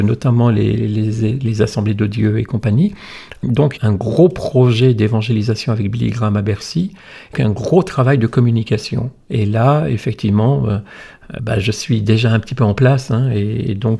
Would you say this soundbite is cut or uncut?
cut